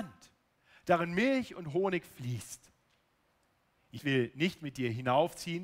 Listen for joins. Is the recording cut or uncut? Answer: cut